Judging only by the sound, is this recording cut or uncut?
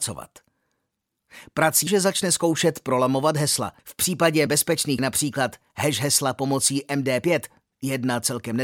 cut